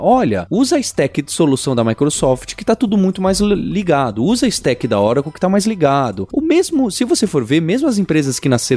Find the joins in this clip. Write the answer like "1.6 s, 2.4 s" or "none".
none